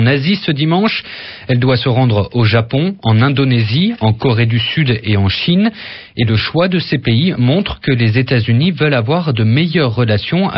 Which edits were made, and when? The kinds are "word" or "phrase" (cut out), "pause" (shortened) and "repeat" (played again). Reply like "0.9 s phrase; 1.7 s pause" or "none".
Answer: none